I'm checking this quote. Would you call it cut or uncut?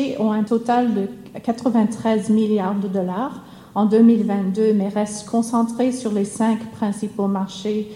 uncut